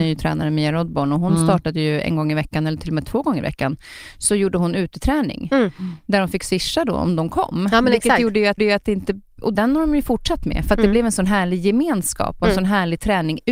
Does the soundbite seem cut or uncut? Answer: cut